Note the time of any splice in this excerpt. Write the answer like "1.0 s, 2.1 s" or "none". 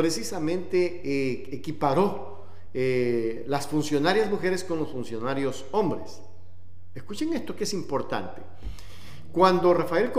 none